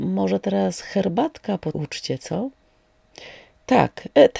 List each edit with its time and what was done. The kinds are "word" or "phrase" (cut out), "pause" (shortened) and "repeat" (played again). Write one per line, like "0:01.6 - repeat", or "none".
0:01.7 - word